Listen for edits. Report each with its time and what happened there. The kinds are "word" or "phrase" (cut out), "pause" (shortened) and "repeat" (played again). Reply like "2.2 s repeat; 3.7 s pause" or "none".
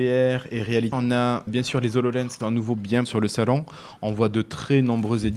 0.9 s word; 1.5 s word; 2.4 s word; 3.1 s word

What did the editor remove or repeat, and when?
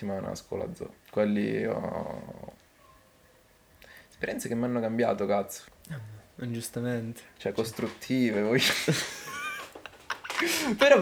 1.0 s pause; 5.7 s pause

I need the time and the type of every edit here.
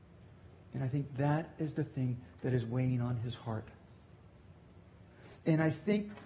none

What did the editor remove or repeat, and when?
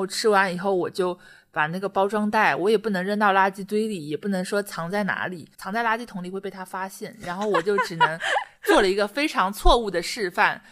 none

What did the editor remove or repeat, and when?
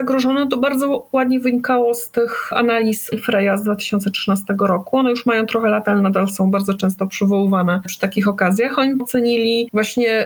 3.1 s word; 9.0 s word

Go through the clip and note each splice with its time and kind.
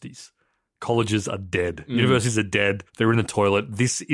2.9 s pause

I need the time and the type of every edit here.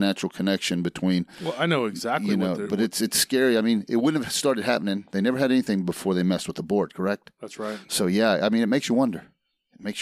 none

